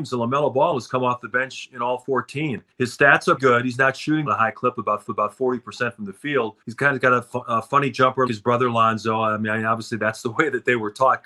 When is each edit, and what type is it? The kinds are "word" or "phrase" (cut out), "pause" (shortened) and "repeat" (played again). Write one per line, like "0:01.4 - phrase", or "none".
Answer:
0:02.7 - pause
0:03.4 - word
0:04.3 - phrase
0:05.1 - repeat
0:06.6 - pause
0:08.3 - word